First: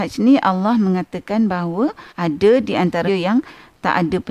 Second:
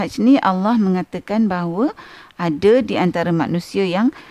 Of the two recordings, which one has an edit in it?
first; 2 cuts; at 2.1 s, 3.1 s

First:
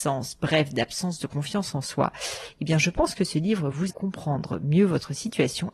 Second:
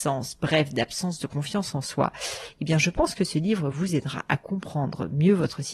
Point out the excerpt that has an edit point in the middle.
first; 1 cut; at 3.9 s

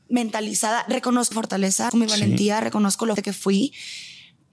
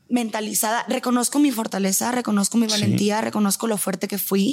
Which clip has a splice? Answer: first; 3 cuts; at 1.3 s, 1.9 s, 3.2 s

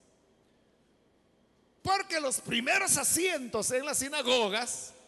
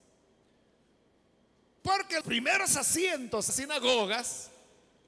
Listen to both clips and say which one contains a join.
second; 2 cuts; at 2.2 s, 3.5 s

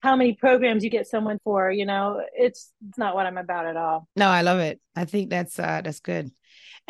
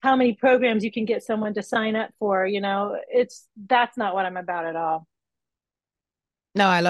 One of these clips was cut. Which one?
first; 4 cuts; at 0.9 s, 1.4 s, 2.9 s, 4.1 s

